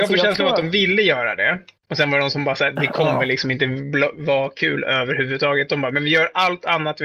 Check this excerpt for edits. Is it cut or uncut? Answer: uncut